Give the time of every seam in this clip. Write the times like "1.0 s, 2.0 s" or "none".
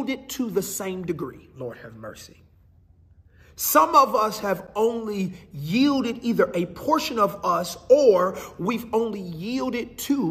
none